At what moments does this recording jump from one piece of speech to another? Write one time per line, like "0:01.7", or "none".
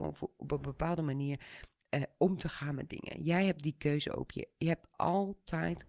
none